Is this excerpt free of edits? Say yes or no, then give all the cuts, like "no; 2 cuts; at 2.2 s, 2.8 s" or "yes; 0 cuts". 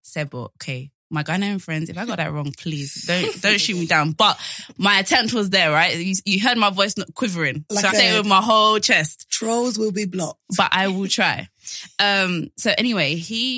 no; 1 cut; at 7.9 s